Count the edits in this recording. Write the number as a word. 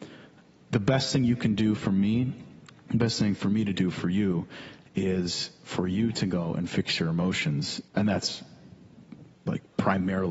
one